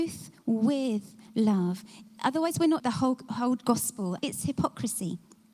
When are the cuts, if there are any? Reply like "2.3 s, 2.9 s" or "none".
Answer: 2.8 s, 4.2 s